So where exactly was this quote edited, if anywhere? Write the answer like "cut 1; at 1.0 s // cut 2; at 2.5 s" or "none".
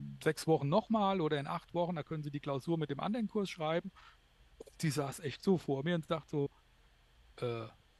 none